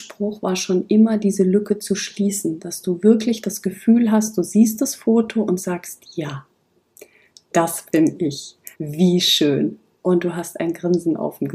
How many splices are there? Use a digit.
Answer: 1